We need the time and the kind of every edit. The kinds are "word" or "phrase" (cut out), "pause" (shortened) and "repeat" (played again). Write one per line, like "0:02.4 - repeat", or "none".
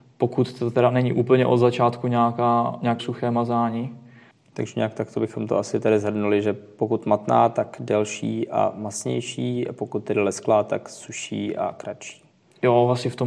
0:03.0 - word

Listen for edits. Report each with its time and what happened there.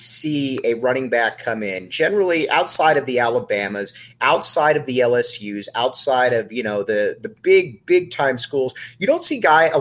none

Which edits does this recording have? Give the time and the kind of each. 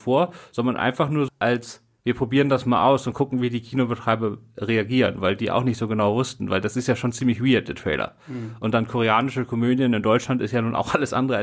0:01.3 - word

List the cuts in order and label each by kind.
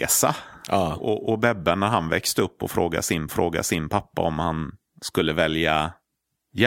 0:03.3 - repeat

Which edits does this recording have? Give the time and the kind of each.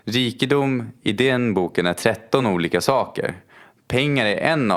none

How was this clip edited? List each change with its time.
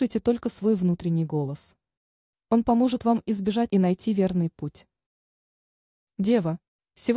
0:03.7 - word

